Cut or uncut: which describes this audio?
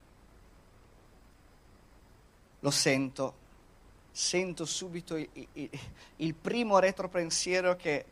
cut